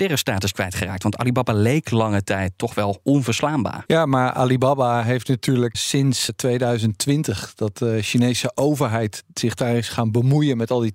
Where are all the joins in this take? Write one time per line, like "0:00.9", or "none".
0:05.7
0:06.3